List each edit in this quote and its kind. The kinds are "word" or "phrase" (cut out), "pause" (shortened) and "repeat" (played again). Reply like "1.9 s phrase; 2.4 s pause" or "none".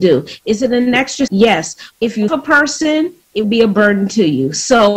1.3 s word; 1.9 s word; 2.3 s word; 3.4 s word

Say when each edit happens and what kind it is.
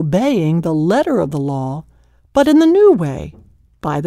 none

